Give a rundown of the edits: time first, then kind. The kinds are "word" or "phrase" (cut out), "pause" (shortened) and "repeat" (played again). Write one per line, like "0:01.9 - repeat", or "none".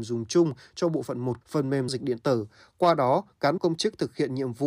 0:01.4 - word
0:01.9 - word
0:03.6 - word